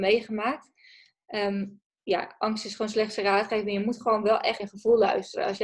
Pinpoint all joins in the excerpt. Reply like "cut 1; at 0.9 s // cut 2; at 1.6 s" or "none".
cut 1; at 4.6 s